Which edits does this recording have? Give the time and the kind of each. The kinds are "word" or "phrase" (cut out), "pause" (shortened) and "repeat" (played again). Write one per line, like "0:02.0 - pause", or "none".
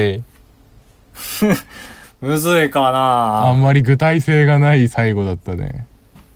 none